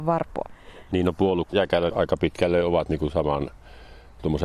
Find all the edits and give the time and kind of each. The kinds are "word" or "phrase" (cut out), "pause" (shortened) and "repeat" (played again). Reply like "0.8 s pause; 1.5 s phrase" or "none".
1.5 s word; 1.9 s word